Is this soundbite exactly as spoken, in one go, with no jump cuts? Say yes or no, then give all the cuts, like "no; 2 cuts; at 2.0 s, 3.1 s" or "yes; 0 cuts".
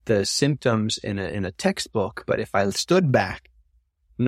yes; 0 cuts